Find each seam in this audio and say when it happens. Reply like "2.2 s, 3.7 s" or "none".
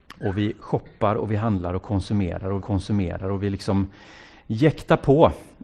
2.6 s